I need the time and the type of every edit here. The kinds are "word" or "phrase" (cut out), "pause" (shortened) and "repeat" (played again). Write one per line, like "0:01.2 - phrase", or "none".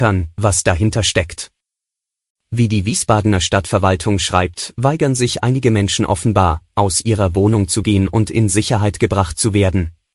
none